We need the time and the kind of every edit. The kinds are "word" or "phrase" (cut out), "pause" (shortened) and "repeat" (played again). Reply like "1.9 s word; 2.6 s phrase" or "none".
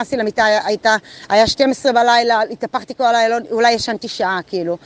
none